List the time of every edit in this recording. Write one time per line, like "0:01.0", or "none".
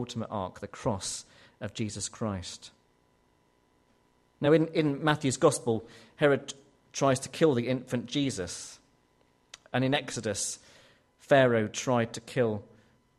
none